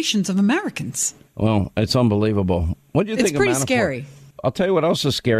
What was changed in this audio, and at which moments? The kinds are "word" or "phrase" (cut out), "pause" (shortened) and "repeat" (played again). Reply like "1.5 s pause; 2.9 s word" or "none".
none